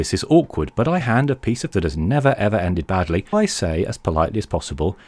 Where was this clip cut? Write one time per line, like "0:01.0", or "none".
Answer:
0:01.0
0:01.7
0:03.3